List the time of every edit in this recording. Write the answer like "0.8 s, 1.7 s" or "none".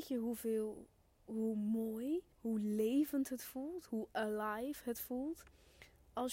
2.3 s